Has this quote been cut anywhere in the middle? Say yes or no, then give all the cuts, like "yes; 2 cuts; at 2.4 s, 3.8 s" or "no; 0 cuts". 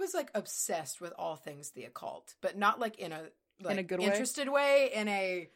no; 0 cuts